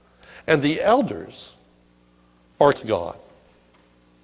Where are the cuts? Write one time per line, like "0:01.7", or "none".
0:02.7

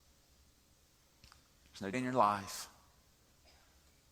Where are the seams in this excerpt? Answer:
0:01.9

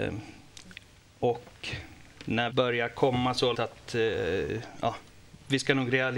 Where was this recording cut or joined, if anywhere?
0:02.5
0:03.5

